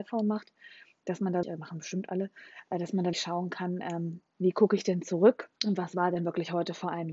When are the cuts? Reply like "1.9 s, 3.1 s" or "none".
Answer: 1.4 s, 3.1 s, 5.6 s